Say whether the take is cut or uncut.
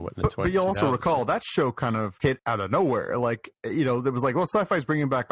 uncut